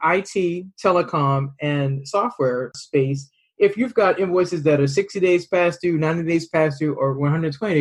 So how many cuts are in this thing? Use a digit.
0